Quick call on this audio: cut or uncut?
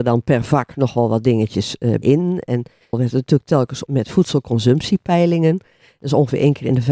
cut